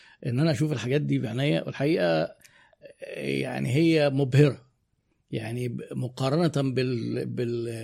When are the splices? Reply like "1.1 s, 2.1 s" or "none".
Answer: none